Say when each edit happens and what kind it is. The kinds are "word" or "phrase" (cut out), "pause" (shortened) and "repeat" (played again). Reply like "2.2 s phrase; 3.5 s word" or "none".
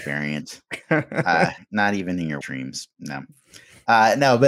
1.6 s word; 2.4 s word